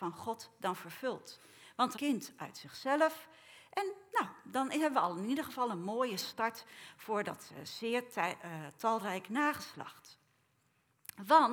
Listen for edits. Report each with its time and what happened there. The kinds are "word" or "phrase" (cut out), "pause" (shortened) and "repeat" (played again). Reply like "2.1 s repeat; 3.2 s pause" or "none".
2.0 s phrase